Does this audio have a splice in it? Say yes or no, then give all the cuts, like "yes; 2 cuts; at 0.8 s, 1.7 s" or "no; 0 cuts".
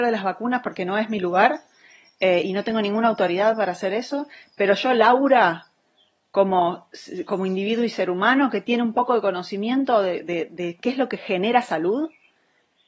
no; 0 cuts